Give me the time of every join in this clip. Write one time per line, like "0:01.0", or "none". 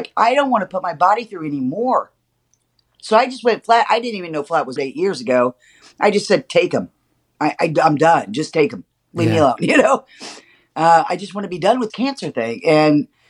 0:04.8
0:11.9

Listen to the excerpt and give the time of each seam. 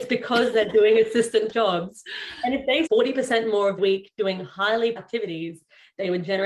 0:01.5
0:02.9
0:03.8
0:05.0

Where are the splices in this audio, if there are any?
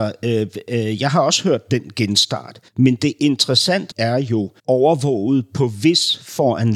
0:02.7
0:03.9
0:04.6

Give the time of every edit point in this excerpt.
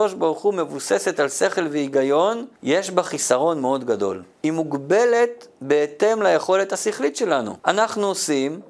0:02.6
0:04.3
0:07.6

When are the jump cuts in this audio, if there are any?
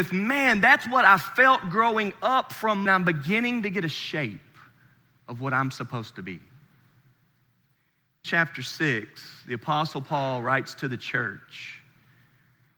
0:02.9
0:08.2

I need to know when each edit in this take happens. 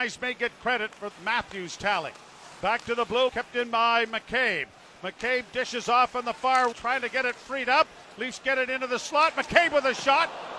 0:01.1
0:03.3
0:06.7

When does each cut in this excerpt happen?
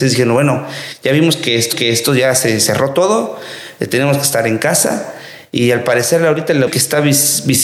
0:01.7
0:06.7

